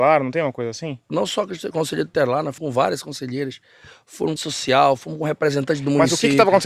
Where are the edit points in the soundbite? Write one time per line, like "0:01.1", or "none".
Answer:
0:01.0
0:02.6
0:04.4